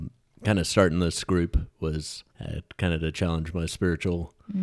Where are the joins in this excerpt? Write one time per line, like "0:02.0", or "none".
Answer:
0:02.3

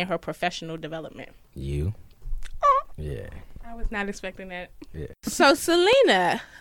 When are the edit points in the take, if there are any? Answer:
none

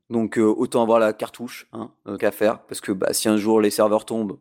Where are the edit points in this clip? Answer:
0:02.2

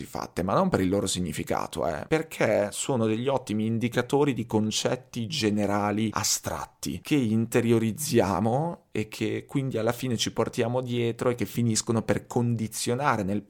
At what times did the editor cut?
none

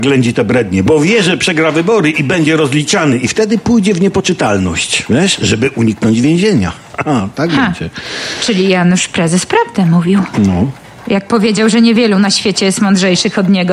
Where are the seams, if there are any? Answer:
none

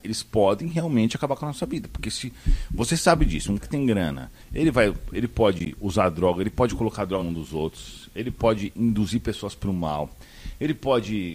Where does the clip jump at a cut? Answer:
0:03.6
0:07.2

